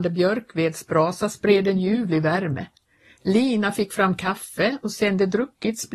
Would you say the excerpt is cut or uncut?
uncut